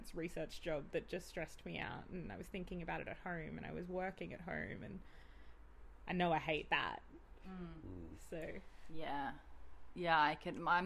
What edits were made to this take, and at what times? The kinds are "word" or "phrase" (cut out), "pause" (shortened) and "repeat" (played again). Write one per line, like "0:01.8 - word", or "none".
none

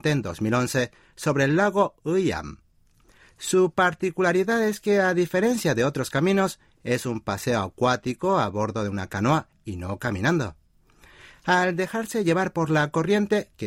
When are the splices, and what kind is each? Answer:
none

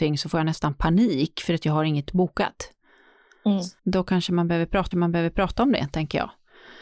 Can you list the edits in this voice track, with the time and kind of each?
0:02.1 - word
0:03.8 - pause
0:04.9 - repeat

